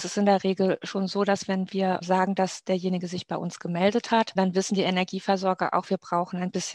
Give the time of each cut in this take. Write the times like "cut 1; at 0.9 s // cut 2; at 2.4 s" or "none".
none